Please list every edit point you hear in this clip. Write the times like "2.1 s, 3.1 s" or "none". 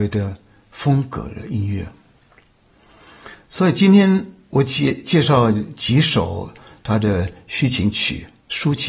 none